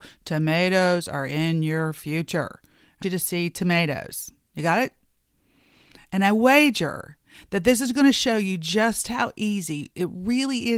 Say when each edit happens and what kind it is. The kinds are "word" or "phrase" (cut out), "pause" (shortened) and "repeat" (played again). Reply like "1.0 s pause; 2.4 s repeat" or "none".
3.0 s word